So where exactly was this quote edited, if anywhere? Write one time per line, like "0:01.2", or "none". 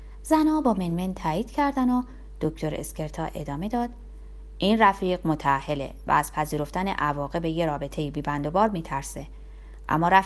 none